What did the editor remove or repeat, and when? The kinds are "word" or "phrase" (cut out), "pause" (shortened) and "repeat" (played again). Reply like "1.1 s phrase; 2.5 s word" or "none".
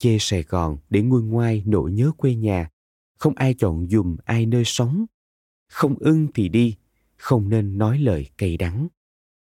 none